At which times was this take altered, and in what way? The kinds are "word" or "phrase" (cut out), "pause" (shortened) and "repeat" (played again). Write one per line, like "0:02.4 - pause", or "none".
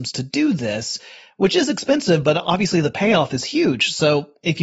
none